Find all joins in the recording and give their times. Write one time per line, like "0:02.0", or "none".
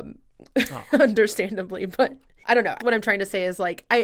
0:02.4
0:02.8